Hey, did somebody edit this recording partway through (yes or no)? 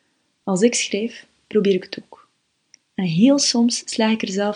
no